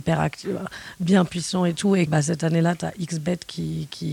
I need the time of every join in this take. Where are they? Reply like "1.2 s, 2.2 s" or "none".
2.1 s